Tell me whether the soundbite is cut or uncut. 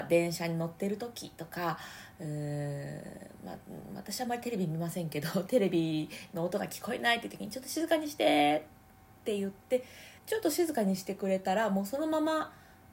cut